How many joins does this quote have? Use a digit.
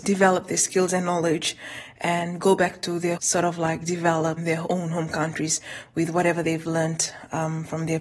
1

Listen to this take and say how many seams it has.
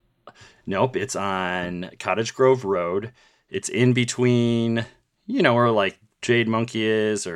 0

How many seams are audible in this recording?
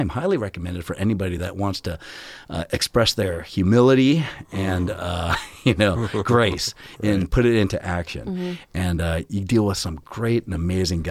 0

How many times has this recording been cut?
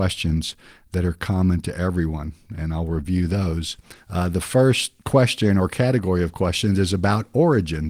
2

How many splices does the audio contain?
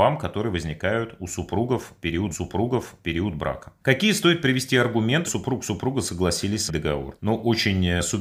3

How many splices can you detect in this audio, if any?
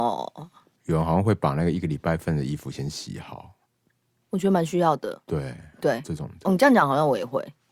0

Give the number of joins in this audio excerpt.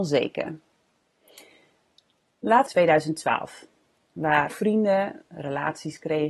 2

